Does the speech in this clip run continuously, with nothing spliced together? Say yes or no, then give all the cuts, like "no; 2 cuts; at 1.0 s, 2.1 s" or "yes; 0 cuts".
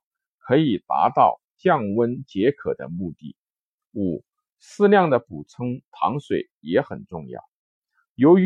yes; 0 cuts